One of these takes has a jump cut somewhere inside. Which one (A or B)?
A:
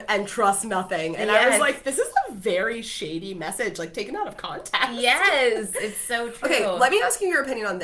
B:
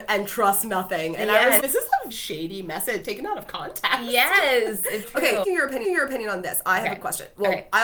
B